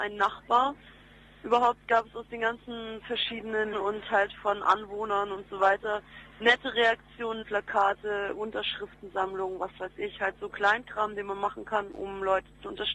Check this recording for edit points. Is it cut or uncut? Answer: cut